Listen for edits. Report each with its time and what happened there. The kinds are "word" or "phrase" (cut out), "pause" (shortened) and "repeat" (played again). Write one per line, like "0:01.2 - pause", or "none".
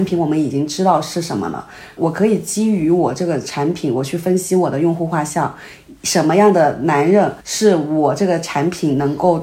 0:07.4 - pause

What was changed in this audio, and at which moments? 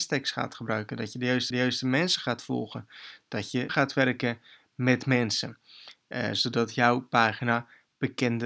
0:01.5 - repeat
0:03.7 - word

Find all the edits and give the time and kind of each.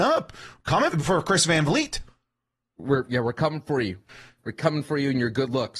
0:00.9 - word

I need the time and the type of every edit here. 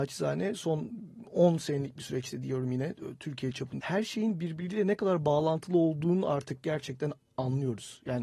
0:03.8 - word

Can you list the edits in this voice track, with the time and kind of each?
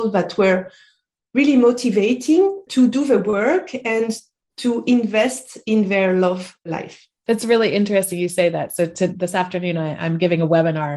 none

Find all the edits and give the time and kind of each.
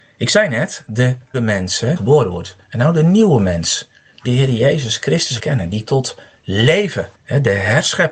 0:01.3 - word
0:02.0 - phrase
0:02.6 - pause
0:04.2 - phrase
0:05.4 - word
0:05.8 - word
0:07.1 - pause

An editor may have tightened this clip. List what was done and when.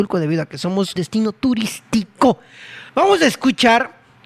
0:01.0 - word
0:02.9 - pause

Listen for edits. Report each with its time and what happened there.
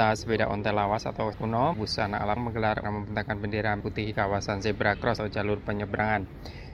0:01.3 - word
0:01.7 - word
0:02.4 - word
0:02.8 - word
0:03.8 - word
0:04.1 - word
0:05.2 - word

